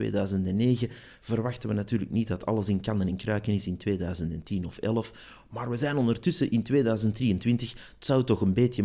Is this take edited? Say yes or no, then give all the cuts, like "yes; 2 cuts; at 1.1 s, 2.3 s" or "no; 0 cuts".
no; 0 cuts